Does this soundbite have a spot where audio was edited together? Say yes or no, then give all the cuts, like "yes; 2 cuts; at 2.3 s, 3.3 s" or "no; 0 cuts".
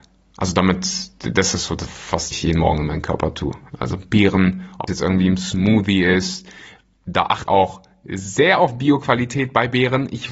yes; 4 cuts; at 1.8 s, 2.3 s, 4.9 s, 7.5 s